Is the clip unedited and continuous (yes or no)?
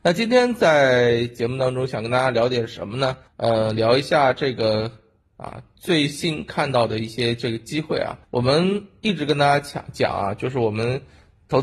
no